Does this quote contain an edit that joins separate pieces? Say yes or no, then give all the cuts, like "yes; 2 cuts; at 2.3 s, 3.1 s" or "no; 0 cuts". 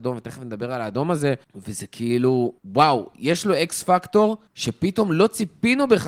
yes; 3 cuts; at 1.4 s, 2.6 s, 4.5 s